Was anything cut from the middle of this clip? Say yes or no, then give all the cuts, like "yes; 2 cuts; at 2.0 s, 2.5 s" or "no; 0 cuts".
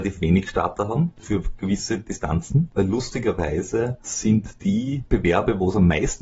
no; 0 cuts